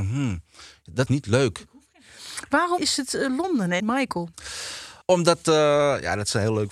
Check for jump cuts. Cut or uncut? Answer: cut